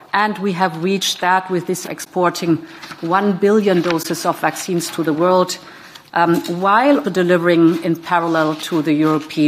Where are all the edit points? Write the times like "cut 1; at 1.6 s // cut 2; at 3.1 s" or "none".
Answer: cut 1; at 1.8 s // cut 2; at 7.0 s

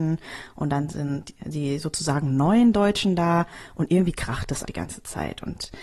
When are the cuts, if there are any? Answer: cut 1; at 4.6 s

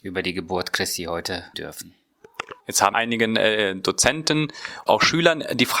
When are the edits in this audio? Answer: cut 1; at 1.5 s // cut 2; at 2.6 s // cut 3; at 2.9 s // cut 4; at 4.9 s

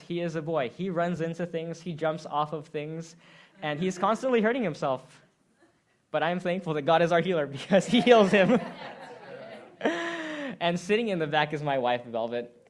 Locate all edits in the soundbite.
none

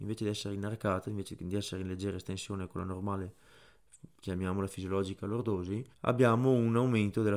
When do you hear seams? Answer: cut 1; at 5.9 s

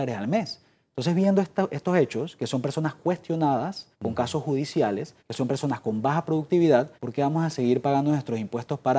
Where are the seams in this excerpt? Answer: cut 1; at 3.9 s // cut 2; at 5.2 s // cut 3; at 6.9 s

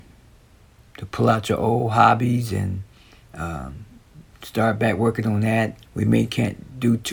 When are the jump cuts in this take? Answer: cut 1; at 5.9 s

